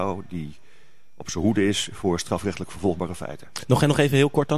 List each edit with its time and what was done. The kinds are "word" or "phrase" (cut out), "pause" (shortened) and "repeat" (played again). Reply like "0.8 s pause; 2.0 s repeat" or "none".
none